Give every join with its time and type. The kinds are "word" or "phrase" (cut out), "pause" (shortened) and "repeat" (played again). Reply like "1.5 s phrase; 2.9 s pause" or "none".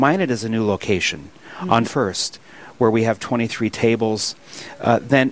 1.8 s word

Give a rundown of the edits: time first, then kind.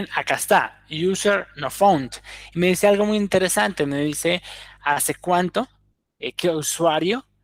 none

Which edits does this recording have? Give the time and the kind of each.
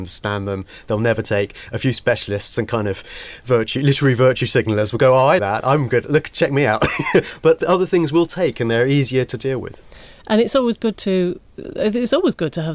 5.4 s word; 7.6 s word

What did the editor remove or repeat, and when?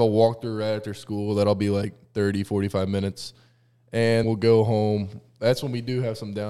4.2 s word

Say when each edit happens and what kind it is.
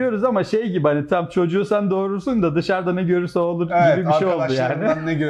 none

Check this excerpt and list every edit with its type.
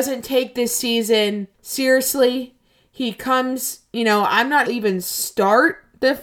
1.5 s pause; 4.7 s phrase

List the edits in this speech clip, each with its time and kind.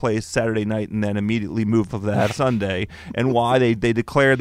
1.9 s word; 2.3 s word

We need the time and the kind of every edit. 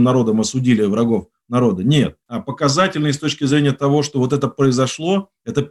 2.2 s pause

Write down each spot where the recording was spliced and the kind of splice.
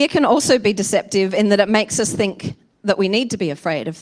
none

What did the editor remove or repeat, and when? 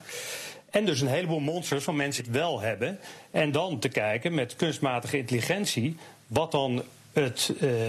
2.2 s word

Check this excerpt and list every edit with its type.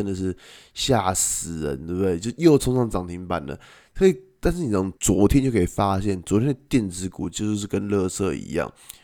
5.0 s pause

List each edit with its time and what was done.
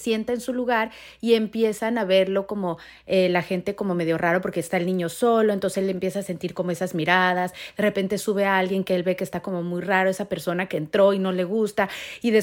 none

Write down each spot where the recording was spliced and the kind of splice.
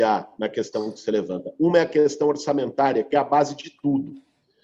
none

